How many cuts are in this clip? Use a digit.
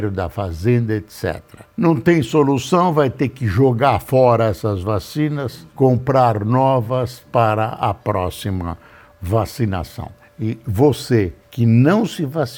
4